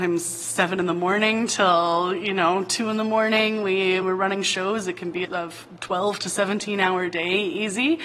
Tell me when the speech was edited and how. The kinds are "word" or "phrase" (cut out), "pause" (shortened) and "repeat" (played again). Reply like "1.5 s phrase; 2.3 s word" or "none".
4.0 s word; 5.2 s word